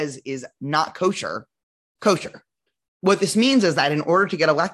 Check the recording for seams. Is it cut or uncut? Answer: cut